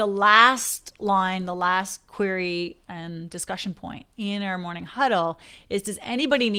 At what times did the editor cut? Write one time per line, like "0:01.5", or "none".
none